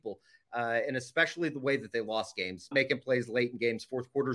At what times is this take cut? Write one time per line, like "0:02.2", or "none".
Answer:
0:02.7